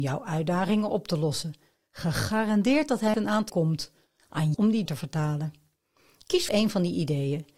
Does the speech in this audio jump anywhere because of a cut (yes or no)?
yes